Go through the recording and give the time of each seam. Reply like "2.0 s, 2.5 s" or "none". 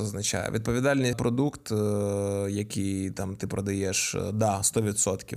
1.1 s